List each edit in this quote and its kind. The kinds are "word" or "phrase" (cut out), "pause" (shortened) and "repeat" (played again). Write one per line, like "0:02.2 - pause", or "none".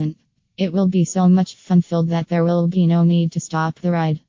none